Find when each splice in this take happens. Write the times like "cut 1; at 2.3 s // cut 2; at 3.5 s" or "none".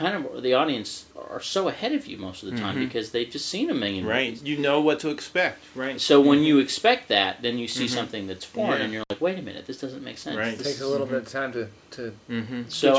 cut 1; at 1.1 s